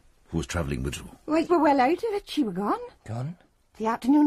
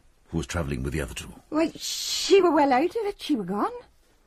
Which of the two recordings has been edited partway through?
first; 3 cuts; at 0.9 s, 1.5 s, 3.0 s

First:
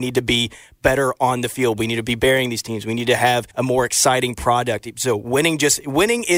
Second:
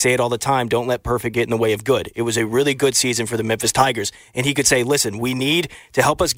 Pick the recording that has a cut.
first; 1 cut; at 3.5 s

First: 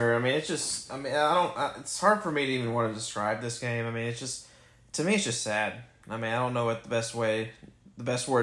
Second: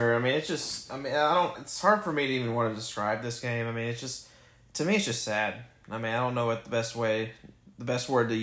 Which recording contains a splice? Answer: second; 1 cut; at 1.5 s

